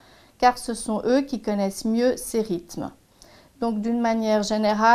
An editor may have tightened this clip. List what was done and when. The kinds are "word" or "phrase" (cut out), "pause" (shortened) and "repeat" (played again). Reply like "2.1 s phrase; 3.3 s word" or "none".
none